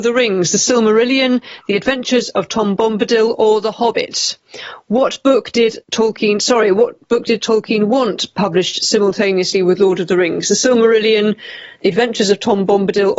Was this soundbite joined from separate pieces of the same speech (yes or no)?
yes